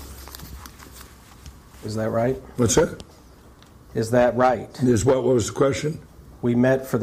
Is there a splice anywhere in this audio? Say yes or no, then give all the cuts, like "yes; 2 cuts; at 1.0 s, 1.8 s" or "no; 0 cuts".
no; 0 cuts